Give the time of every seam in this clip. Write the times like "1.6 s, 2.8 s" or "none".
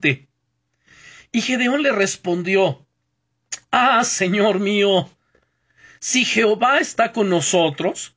none